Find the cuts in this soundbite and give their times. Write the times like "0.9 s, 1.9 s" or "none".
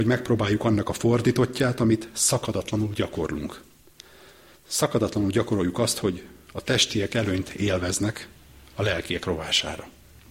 none